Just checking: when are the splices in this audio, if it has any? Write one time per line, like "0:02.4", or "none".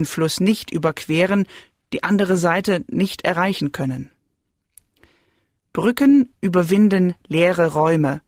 none